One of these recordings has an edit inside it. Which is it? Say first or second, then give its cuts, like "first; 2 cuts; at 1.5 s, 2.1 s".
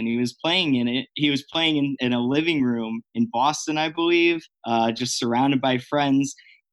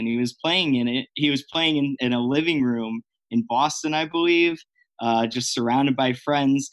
first; 2 cuts; at 3.1 s, 4.5 s